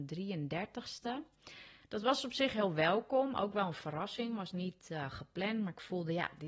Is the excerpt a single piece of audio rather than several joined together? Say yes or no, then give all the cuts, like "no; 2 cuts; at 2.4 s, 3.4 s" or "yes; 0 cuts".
yes; 0 cuts